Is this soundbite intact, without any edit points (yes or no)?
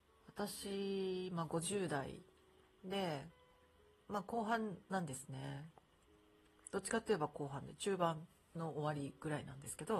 yes